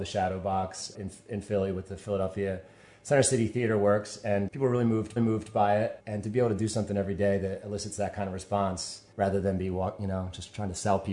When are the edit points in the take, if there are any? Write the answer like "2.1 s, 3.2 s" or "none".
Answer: 0.9 s, 4.5 s, 5.2 s, 6.0 s, 9.1 s